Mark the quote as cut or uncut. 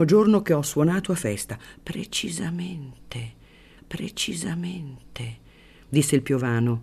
cut